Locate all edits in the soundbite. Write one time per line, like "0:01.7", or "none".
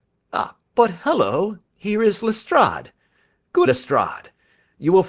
0:03.7